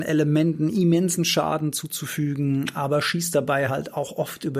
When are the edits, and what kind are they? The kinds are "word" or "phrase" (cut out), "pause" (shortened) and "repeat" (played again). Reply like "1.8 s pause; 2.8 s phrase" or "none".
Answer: none